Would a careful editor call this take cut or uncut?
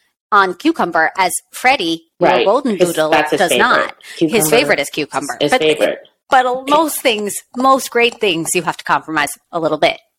cut